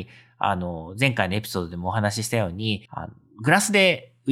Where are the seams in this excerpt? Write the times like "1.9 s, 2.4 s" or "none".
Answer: 2.9 s